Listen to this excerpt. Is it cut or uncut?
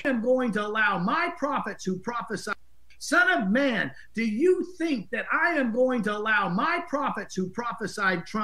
uncut